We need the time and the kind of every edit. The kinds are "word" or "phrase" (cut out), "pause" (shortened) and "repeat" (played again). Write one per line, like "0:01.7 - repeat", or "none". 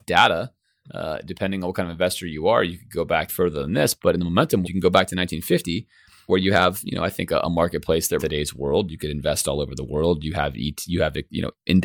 0:03.3 - word
0:04.6 - word
0:06.3 - word
0:08.2 - word